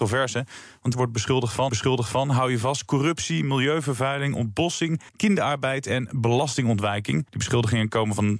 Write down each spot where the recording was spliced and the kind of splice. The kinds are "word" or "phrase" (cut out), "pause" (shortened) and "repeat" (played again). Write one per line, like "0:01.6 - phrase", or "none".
0:00.9 - word
0:01.7 - repeat
0:05.1 - pause
0:07.3 - pause